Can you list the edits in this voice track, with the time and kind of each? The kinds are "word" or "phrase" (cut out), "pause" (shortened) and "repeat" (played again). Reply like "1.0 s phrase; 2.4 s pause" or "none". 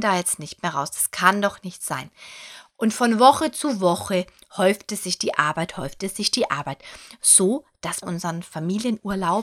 8.0 s phrase